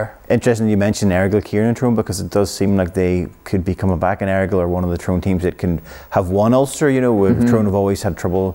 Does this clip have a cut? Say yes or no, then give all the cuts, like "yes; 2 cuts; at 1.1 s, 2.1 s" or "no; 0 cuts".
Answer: no; 0 cuts